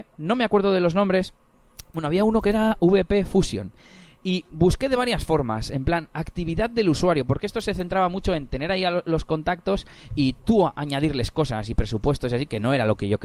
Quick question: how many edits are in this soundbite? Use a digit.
0